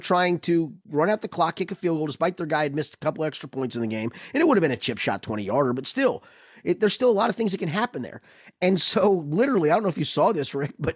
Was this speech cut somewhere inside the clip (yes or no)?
no